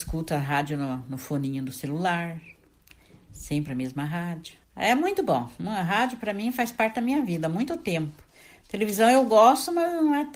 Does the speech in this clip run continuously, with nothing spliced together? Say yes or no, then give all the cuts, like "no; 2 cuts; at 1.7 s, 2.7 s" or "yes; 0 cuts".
no; 1 cut; at 4.6 s